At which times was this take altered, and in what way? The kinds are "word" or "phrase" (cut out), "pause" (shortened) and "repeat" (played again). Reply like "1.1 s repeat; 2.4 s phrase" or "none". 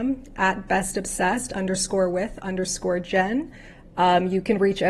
none

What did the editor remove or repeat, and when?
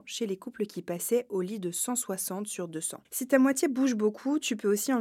none

